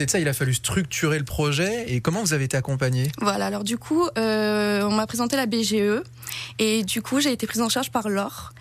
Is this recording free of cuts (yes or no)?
yes